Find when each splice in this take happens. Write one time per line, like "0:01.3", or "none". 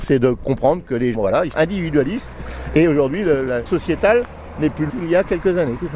0:01.1
0:01.5
0:03.7
0:04.9